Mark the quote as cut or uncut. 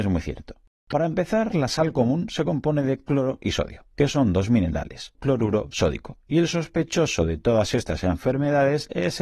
cut